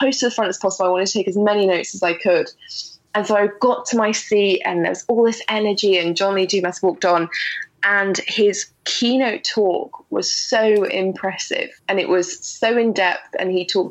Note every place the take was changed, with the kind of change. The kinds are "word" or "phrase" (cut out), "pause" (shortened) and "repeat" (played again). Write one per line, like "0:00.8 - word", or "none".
0:11.8 - pause